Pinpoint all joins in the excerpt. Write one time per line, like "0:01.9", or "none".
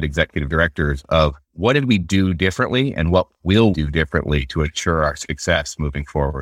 0:01.4
0:03.7